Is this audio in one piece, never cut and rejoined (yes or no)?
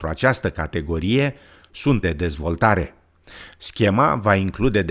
no